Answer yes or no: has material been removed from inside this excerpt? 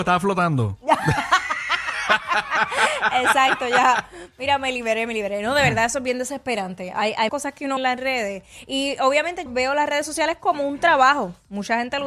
yes